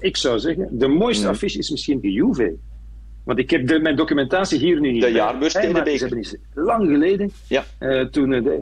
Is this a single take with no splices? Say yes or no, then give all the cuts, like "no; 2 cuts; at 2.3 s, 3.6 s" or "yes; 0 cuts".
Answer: no; 1 cut; at 2.0 s